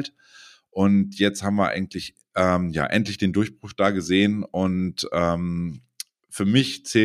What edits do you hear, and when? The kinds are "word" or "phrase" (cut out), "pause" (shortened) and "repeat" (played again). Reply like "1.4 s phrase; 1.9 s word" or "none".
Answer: none